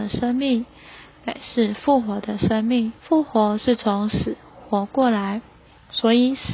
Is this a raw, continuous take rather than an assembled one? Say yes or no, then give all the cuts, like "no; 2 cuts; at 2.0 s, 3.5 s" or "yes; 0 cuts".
no; 1 cut; at 3.0 s